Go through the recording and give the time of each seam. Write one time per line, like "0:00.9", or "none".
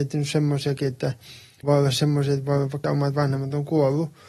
0:01.6
0:02.8